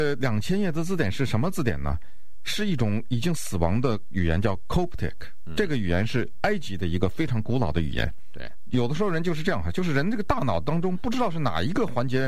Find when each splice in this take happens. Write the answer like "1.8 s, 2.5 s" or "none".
none